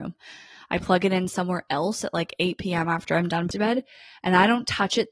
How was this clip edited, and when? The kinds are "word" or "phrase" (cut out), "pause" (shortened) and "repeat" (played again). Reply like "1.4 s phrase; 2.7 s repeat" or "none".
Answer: 3.5 s phrase